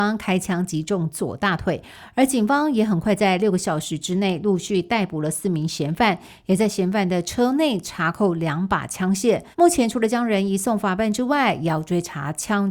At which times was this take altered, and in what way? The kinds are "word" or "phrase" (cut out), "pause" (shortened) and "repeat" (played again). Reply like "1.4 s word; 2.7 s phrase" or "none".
9.5 s pause